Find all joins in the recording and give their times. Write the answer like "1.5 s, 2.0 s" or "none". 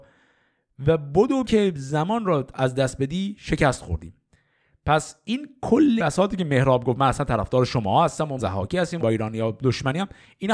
1.4 s, 6.0 s, 8.4 s, 9.0 s